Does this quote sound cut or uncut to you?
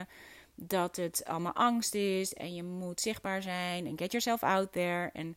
uncut